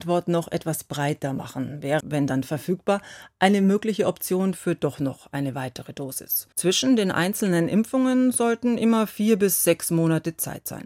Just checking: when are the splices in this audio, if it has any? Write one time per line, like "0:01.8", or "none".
0:02.0
0:06.5